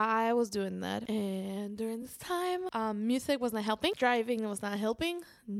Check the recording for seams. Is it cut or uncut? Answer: uncut